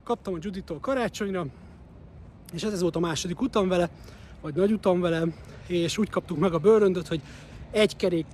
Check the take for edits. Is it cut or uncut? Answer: uncut